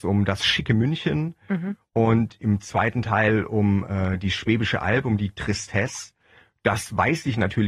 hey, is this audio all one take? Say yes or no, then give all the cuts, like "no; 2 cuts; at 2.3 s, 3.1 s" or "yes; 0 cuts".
yes; 0 cuts